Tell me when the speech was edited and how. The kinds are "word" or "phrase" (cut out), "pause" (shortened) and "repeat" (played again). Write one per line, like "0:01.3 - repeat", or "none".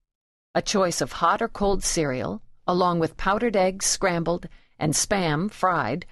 none